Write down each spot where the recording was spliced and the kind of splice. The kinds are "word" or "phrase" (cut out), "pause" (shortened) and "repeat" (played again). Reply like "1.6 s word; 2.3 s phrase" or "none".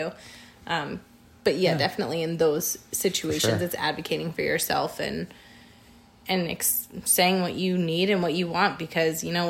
none

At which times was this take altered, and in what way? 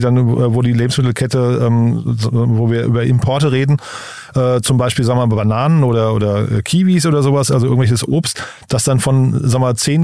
none

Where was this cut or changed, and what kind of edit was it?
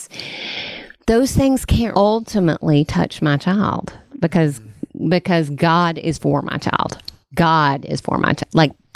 1.9 s word

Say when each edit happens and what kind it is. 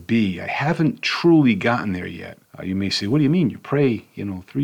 2.4 s pause

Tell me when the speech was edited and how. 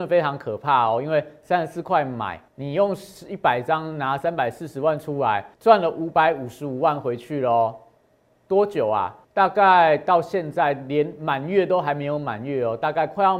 2.5 s pause; 5.5 s pause; 9.2 s pause

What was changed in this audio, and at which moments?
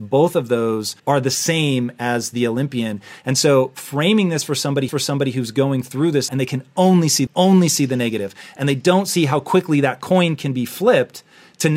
1.0 s pause; 4.9 s repeat; 6.3 s word; 7.3 s phrase

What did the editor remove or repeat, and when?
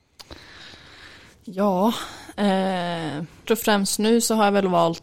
3.5 s word

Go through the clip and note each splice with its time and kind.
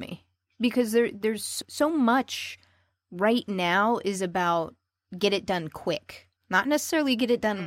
6.4 s pause

